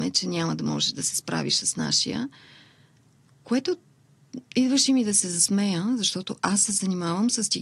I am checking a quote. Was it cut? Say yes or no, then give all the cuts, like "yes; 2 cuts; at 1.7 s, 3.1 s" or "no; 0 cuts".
no; 0 cuts